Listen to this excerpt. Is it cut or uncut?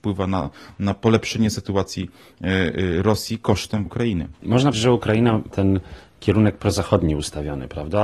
cut